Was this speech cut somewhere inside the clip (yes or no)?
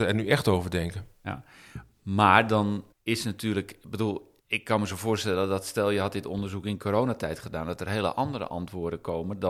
yes